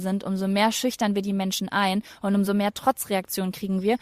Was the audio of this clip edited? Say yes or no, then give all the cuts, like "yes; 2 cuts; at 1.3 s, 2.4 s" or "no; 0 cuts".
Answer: no; 0 cuts